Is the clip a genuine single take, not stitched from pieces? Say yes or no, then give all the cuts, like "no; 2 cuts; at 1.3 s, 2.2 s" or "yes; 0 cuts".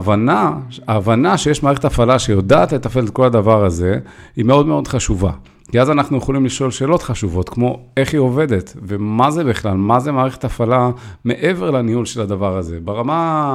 yes; 0 cuts